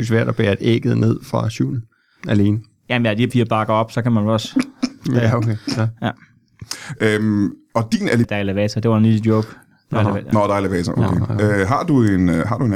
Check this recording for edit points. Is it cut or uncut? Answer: cut